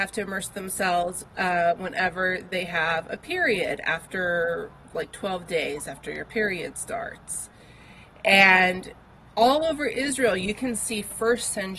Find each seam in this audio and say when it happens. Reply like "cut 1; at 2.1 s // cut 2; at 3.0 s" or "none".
none